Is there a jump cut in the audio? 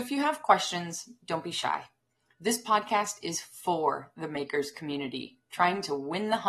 no; 0 cuts

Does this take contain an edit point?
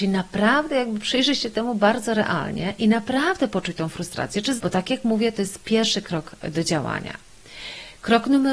yes; 1 cut; at 4.6 s

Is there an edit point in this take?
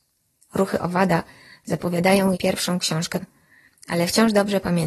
yes; 2 cuts; at 2.3 s, 3.2 s

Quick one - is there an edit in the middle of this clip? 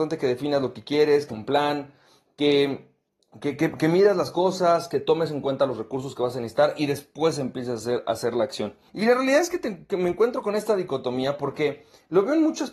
yes; 3 cuts; at 1.3 s, 3.1 s, 8.9 s

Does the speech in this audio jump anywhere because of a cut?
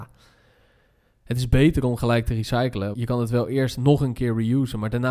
yes; 1 cut; at 2.9 s

